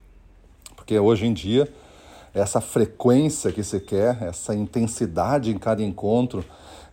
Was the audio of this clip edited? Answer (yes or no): no